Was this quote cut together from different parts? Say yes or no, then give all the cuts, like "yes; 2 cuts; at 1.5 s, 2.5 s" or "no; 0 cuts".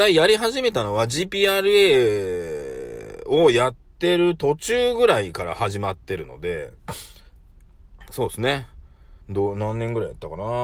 yes; 1 cut; at 9.2 s